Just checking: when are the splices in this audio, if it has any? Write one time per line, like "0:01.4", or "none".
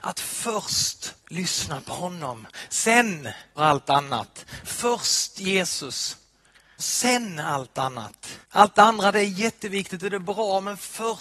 0:01.2
0:03.6
0:06.8
0:08.4